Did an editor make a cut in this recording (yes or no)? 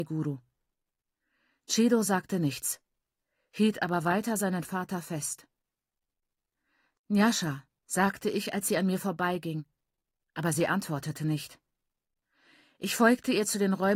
no